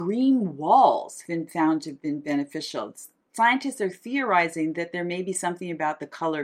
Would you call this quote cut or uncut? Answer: cut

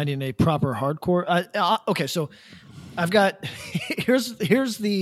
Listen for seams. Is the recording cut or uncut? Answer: uncut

